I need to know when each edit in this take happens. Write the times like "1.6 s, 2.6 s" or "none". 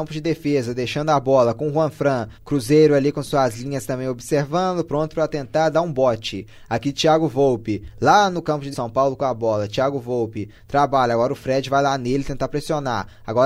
2.3 s, 8.7 s